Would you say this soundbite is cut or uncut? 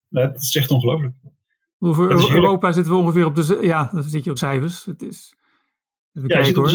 cut